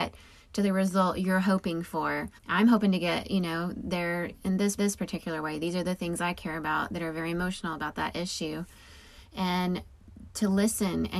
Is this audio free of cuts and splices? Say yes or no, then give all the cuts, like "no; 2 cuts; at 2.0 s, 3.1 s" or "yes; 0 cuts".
no; 2 cuts; at 2.4 s, 4.8 s